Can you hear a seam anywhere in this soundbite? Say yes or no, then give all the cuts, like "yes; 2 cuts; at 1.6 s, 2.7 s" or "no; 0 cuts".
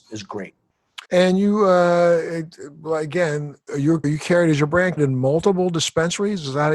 yes; 4 cuts; at 1.0 s, 3.7 s, 4.0 s, 5.0 s